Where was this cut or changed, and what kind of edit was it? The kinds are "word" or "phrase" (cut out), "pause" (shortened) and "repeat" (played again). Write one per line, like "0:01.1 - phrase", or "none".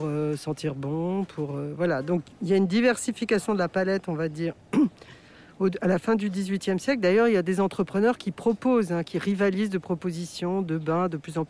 none

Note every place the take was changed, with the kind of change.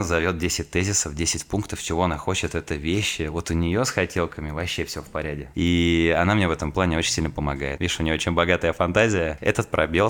none

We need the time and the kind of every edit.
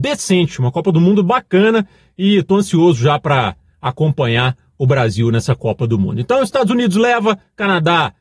none

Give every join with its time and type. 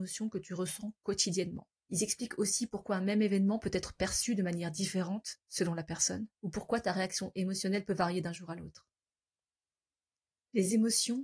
0:01.8 - pause
0:06.3 - pause

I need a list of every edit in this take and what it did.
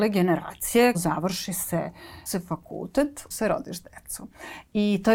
0:00.9 - word
0:02.3 - phrase
0:03.3 - word

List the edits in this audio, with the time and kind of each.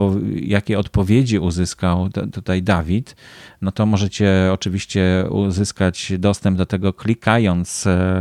none

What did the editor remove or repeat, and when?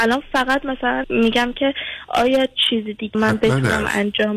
0:01.0 - word
0:03.1 - phrase

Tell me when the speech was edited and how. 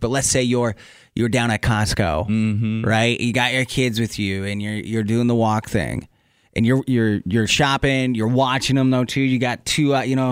none

